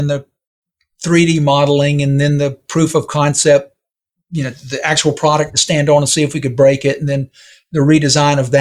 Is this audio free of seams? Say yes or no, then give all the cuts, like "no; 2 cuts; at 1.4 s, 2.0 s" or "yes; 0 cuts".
yes; 0 cuts